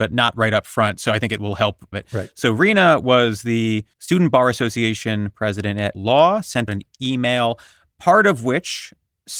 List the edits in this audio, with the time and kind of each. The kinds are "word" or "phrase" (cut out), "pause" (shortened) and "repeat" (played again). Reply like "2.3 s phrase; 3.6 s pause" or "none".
1.9 s phrase; 3.9 s pause; 5.9 s word; 6.7 s word